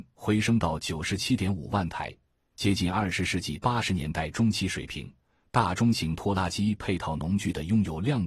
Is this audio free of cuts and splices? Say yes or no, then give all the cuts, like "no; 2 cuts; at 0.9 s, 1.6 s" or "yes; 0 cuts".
yes; 0 cuts